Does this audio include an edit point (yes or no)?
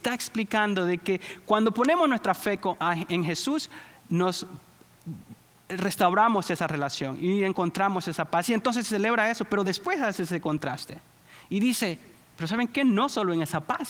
no